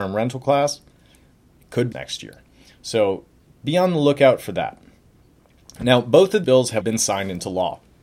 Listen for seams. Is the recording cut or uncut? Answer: cut